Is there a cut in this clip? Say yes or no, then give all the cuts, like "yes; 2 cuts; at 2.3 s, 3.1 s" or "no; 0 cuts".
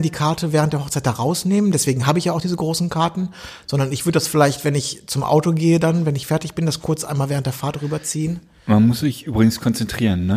no; 0 cuts